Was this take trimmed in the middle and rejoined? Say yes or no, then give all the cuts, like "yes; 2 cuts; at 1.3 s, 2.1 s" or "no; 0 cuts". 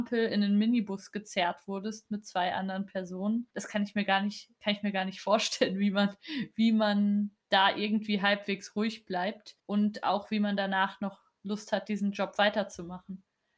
yes; 3 cuts; at 3.5 s, 7.4 s, 9.6 s